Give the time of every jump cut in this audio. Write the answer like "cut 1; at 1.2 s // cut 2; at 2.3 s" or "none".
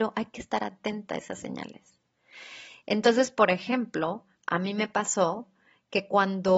none